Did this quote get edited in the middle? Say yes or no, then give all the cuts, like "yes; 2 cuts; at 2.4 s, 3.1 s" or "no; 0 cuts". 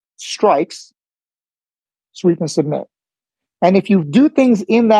no; 0 cuts